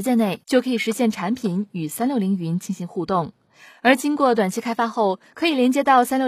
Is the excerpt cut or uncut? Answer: uncut